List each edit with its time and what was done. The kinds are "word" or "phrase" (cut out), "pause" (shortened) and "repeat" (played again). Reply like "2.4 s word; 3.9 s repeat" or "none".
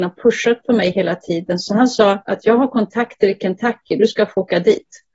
none